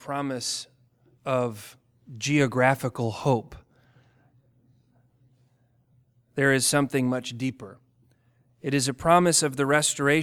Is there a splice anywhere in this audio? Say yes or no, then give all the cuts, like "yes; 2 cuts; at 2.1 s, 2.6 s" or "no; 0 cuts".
no; 0 cuts